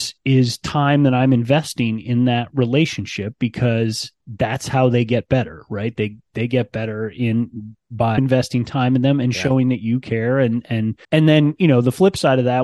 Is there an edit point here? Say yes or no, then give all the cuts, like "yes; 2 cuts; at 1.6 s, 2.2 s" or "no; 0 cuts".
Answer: yes; 2 cuts; at 8.2 s, 11.0 s